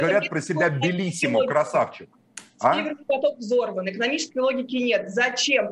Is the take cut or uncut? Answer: uncut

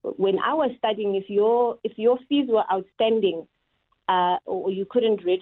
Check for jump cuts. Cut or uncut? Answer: uncut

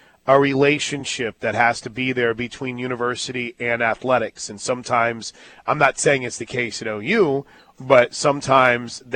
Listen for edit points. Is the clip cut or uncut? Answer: uncut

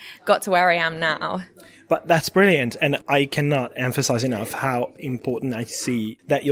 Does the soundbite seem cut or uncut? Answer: uncut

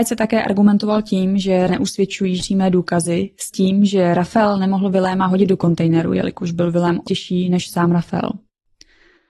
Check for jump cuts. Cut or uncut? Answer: cut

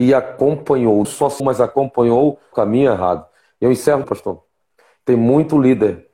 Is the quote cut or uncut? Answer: cut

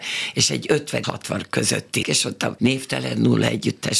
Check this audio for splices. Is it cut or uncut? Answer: cut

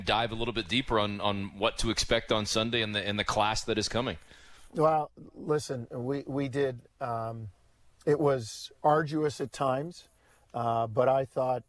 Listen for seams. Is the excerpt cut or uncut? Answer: uncut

